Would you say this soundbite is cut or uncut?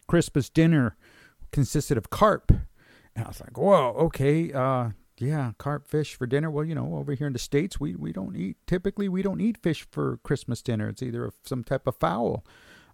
uncut